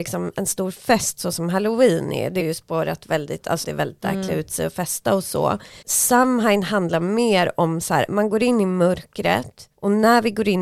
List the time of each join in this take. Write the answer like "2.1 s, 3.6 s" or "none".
2.4 s, 3.6 s, 5.8 s, 8.1 s, 9.7 s